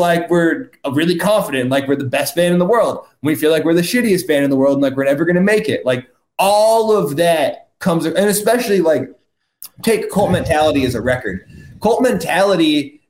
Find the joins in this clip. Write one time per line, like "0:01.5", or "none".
none